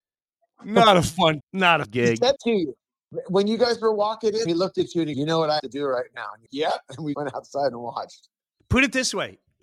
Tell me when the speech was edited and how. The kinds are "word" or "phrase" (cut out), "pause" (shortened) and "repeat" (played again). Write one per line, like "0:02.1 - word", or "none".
0:01.4 - word
0:01.8 - word
0:02.4 - word
0:04.5 - word
0:05.1 - word
0:05.6 - word
0:06.5 - word
0:07.1 - word